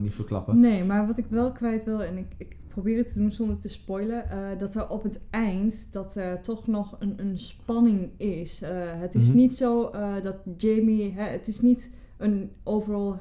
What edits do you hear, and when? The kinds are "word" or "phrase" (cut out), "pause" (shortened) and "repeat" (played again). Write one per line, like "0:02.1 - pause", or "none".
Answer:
none